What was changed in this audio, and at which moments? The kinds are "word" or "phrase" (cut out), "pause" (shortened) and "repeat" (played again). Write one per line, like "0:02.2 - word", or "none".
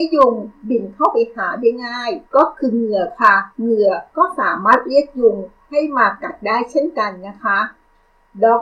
0:02.3 - pause
0:03.5 - pause